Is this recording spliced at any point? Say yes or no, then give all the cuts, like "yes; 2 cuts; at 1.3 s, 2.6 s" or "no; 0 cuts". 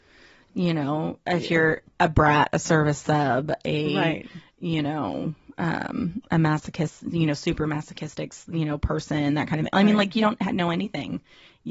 no; 0 cuts